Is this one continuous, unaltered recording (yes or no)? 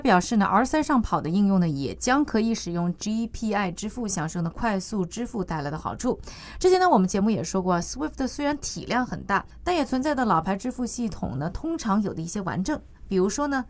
yes